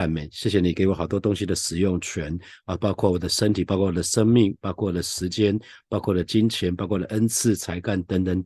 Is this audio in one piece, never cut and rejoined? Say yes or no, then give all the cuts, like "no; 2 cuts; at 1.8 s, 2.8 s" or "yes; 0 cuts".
yes; 0 cuts